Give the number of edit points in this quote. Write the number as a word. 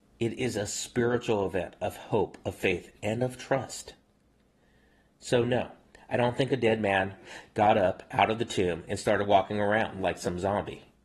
zero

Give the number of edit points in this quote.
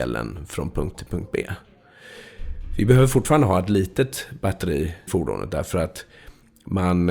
two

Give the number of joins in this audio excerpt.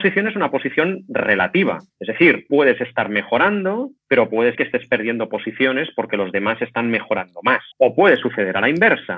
five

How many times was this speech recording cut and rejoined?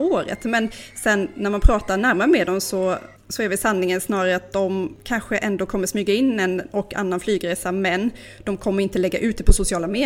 zero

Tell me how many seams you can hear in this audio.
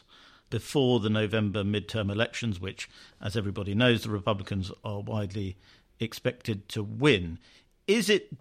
zero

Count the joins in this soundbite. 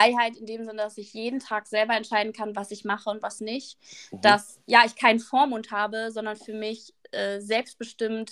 one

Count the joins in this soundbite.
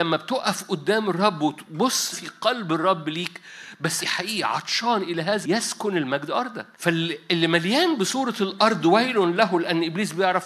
four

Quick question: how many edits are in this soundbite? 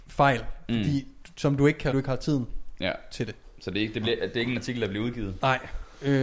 one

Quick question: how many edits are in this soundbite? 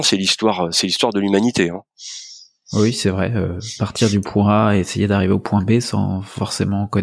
zero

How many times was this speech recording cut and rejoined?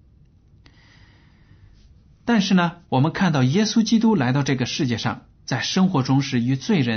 two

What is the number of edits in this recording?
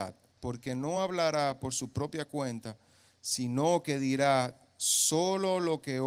zero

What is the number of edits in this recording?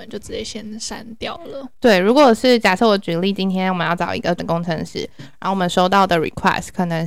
one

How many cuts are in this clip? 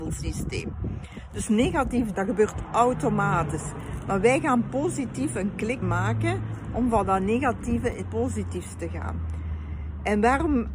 three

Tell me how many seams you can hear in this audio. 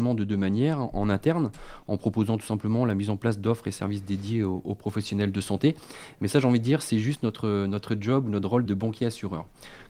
one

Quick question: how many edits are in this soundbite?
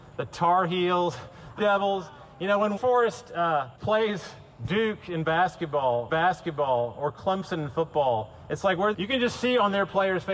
five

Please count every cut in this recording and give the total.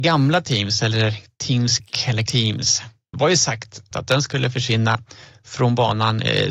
four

